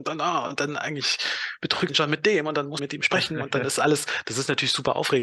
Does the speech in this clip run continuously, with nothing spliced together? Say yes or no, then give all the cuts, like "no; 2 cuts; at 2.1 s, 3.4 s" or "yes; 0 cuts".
no; 2 cuts; at 1.9 s, 2.8 s